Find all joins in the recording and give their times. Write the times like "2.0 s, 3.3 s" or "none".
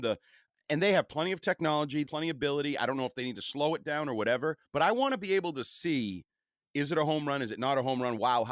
2.1 s, 4.6 s